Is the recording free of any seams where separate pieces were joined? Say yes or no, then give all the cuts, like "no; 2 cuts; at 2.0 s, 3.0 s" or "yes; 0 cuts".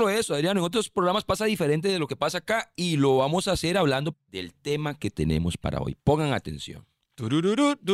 no; 1 cut; at 4.1 s